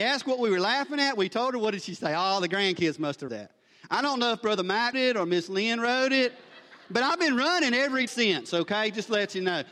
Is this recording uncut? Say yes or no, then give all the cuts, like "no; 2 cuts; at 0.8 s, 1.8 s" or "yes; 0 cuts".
no; 3 cuts; at 3.3 s, 4.9 s, 8.1 s